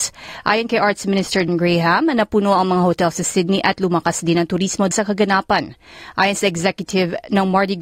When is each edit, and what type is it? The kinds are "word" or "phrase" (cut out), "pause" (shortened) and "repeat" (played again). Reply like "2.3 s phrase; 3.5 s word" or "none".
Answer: 1.5 s word; 4.9 s word